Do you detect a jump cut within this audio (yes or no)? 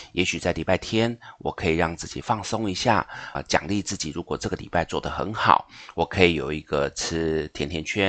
yes